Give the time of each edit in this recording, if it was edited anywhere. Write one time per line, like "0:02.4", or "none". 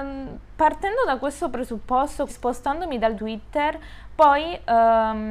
0:02.3
0:03.2